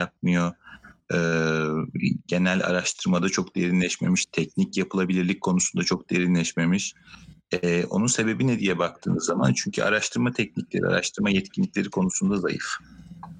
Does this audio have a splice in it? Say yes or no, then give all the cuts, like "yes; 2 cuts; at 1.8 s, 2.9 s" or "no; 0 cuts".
no; 0 cuts